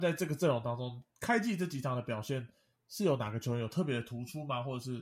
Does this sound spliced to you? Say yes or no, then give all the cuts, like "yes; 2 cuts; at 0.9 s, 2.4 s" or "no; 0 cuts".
yes; 1 cut; at 1.1 s